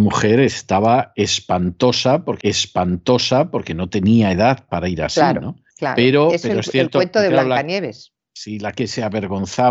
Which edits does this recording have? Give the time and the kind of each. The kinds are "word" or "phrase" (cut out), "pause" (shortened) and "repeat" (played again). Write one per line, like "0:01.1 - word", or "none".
0:02.4 - repeat
0:04.7 - word
0:05.7 - pause